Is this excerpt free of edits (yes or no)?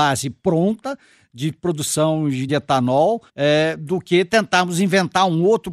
no